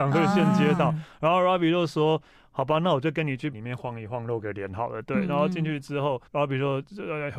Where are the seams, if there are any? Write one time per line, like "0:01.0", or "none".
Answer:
0:03.5
0:06.3

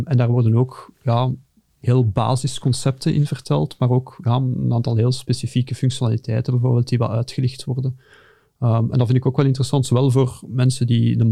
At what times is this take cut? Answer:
none

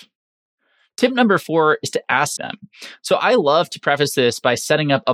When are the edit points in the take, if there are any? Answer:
0:02.4

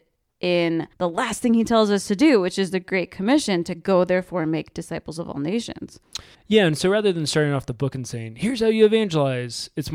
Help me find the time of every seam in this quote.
0:00.9
0:06.3

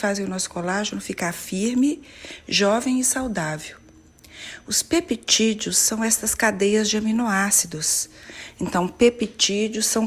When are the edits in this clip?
none

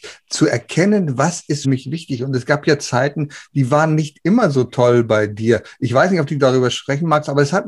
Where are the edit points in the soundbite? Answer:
0:01.6

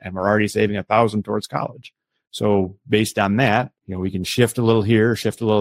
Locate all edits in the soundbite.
0:03.8

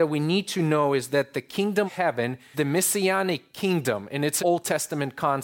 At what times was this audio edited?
0:01.9
0:02.5
0:04.4

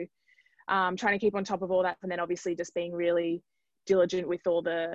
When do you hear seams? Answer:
0:02.0

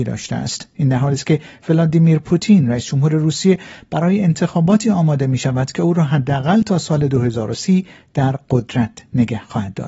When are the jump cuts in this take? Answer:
none

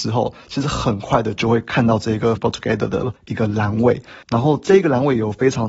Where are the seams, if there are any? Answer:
0:02.4
0:03.2
0:04.2

